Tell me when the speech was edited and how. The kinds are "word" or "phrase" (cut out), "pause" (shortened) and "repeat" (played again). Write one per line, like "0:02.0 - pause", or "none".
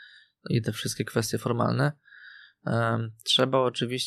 none